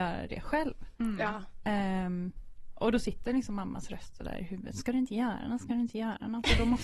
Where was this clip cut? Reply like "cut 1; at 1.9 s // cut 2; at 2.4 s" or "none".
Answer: none

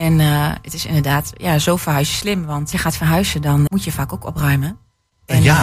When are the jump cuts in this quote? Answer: cut 1; at 2.7 s // cut 2; at 3.7 s

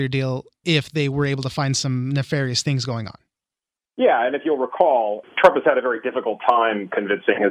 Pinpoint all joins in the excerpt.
none

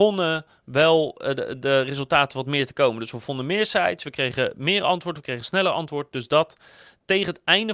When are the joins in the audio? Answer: none

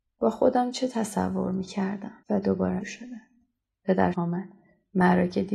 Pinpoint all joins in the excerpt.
cut 1; at 2.2 s // cut 2; at 2.8 s // cut 3; at 4.1 s

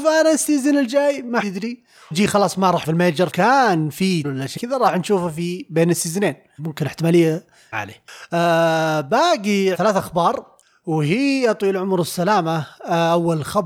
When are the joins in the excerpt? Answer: cut 1; at 1.4 s // cut 2; at 2.1 s // cut 3; at 2.8 s // cut 4; at 3.3 s // cut 5; at 4.2 s // cut 6; at 4.6 s // cut 7; at 6.6 s // cut 8; at 7.7 s // cut 9; at 9.7 s

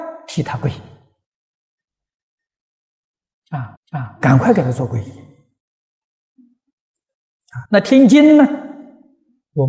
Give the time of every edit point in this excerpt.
cut 1; at 3.8 s // cut 2; at 7.7 s

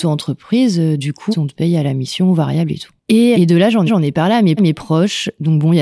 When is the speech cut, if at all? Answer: cut 1; at 1.3 s // cut 2; at 3.3 s // cut 3; at 3.9 s // cut 4; at 4.6 s

